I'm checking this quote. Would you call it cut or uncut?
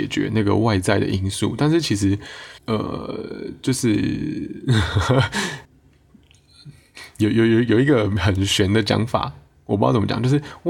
cut